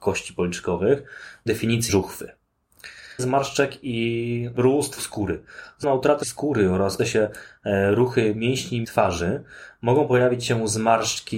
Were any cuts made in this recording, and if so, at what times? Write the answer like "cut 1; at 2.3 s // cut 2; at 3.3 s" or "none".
cut 1; at 1.5 s // cut 2; at 1.9 s // cut 3; at 3.2 s // cut 4; at 5.0 s // cut 5; at 5.8 s // cut 6; at 6.2 s // cut 7; at 7.0 s // cut 8; at 8.8 s